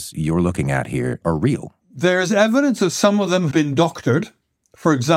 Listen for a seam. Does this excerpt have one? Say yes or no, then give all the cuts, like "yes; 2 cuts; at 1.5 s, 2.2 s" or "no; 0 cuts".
yes; 2 cuts; at 1.8 s, 3.5 s